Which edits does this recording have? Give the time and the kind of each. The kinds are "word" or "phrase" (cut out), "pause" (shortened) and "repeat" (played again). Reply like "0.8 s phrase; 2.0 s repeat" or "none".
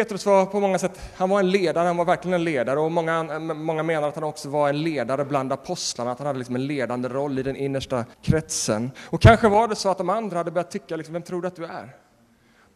8.1 s pause